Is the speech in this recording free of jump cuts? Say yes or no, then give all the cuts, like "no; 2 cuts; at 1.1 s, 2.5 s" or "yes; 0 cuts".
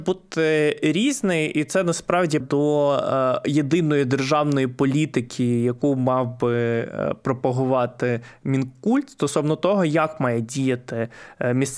no; 1 cut; at 2.4 s